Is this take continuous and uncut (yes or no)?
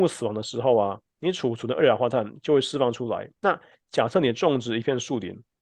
no